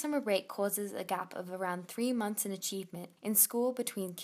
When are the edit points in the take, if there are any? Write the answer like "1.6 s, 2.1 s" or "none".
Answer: 3.2 s